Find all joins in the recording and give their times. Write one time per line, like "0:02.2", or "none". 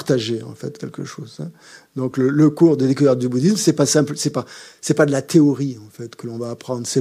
none